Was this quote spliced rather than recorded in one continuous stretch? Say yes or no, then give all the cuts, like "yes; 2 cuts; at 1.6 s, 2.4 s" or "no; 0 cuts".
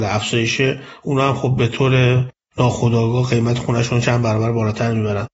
no; 0 cuts